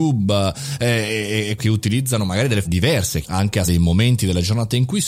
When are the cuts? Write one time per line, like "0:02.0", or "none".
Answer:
0:01.6
0:02.6
0:03.2
0:03.7